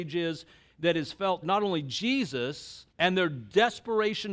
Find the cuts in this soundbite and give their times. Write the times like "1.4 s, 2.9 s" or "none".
1.4 s, 2.9 s